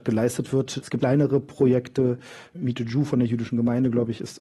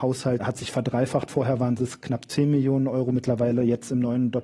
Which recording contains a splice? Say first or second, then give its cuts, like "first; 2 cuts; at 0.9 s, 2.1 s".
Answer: first; 1 cut; at 1.0 s